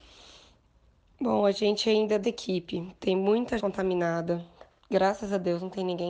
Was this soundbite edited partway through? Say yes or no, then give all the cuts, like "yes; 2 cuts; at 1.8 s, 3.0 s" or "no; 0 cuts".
yes; 2 cuts; at 2.2 s, 3.6 s